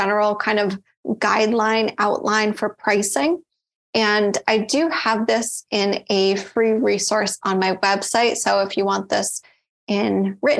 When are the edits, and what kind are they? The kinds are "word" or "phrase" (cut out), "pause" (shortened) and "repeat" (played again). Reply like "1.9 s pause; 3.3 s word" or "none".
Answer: none